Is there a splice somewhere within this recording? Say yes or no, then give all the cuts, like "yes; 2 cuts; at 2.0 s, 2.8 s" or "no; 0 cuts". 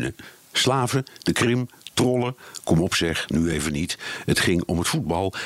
no; 0 cuts